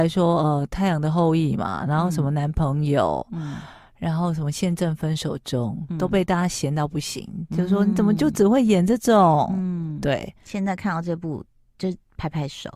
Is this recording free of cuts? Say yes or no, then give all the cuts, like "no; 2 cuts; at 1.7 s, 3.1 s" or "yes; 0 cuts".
yes; 0 cuts